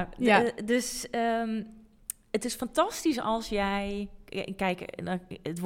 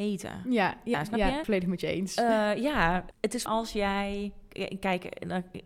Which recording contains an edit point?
second; 4 cuts; at 0.9 s, 1.4 s, 3.1 s, 3.5 s

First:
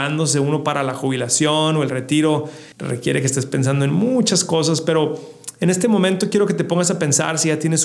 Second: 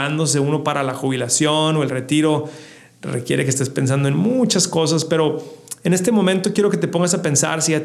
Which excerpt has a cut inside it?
first; 1 cut; at 2.7 s

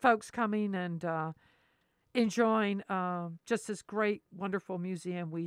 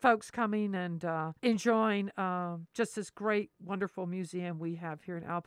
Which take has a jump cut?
second; 1 cut; at 1.4 s

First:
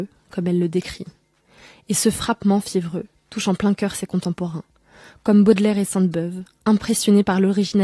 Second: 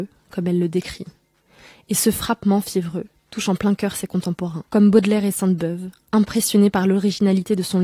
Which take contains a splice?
second; 1 cut; at 4.7 s

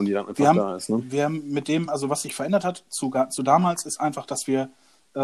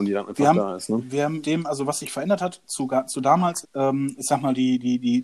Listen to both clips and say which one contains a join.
second; 2 cuts; at 1.4 s, 3.6 s

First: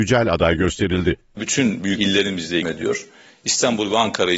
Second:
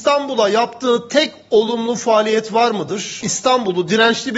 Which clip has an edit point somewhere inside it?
first; 2 cuts; at 2.0 s, 2.6 s

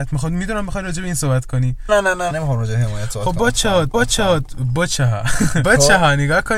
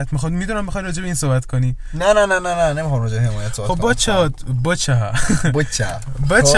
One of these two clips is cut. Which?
first; 4 cuts; at 1.9 s, 2.3 s, 3.9 s, 5.6 s

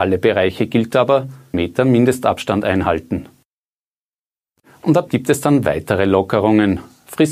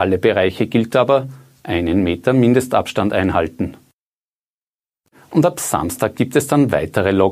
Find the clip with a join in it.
first; 2 cuts; at 1.5 s, 5.1 s

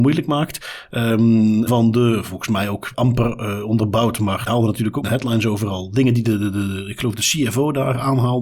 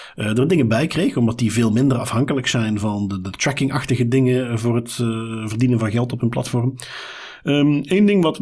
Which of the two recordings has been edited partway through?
first; 4 cuts; at 1.7 s, 2.9 s, 4.5 s, 5.0 s

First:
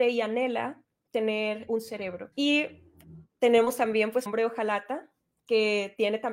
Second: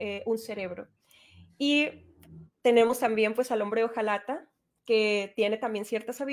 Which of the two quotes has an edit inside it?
first; 3 cuts; at 1.7 s, 2.3 s, 4.3 s

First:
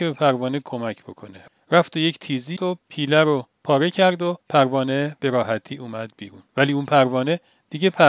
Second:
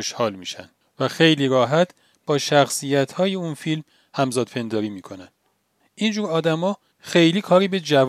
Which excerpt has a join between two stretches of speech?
first; 3 cuts; at 2.6 s, 4.4 s, 6.5 s

